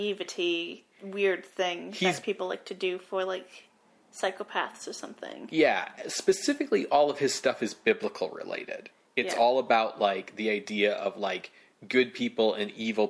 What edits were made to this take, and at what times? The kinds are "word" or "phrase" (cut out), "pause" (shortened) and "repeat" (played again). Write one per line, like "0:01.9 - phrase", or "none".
none